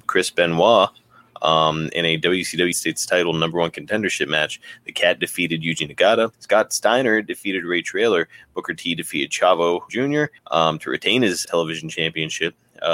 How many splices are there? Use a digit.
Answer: 5